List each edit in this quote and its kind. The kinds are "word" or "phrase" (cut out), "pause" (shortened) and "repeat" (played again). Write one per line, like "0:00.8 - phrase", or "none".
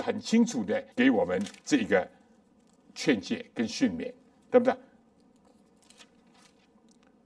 0:00.9 - pause
0:01.6 - pause